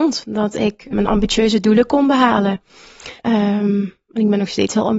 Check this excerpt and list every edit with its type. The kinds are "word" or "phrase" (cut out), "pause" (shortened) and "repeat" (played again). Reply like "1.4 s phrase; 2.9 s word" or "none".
0.9 s word; 3.2 s pause